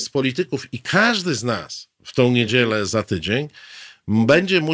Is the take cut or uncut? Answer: uncut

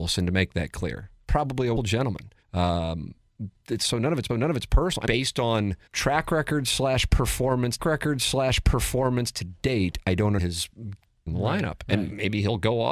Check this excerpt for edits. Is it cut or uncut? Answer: cut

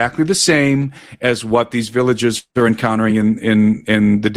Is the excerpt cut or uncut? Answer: uncut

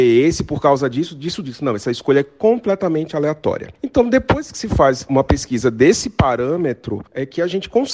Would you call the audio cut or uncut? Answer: uncut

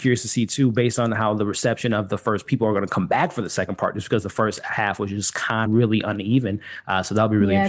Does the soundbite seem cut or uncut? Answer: cut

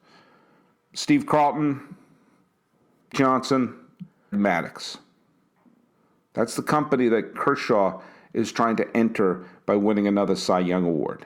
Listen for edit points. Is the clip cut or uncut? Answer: cut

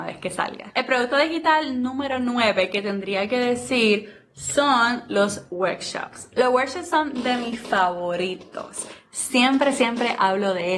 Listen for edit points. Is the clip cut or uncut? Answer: uncut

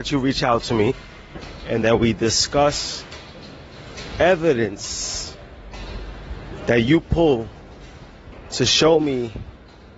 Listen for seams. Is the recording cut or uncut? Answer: uncut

